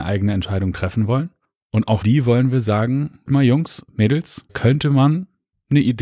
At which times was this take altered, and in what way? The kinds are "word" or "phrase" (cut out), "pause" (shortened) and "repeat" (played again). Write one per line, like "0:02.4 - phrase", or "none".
0:01.4 - pause
0:02.0 - word
0:03.3 - word
0:04.5 - word